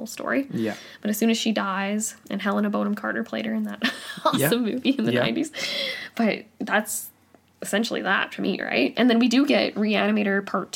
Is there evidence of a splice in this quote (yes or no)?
no